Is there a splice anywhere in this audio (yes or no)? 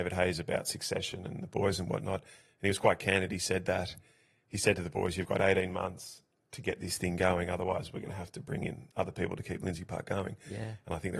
no